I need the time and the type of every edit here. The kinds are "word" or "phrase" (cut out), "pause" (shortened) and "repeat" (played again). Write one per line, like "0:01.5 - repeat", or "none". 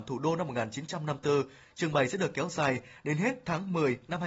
none